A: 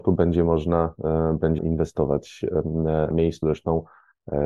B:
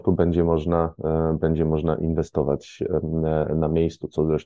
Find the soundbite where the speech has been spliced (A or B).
A